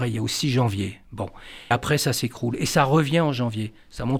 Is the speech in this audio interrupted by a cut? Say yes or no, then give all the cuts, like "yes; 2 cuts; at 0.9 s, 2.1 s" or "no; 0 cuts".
yes; 1 cut; at 1.7 s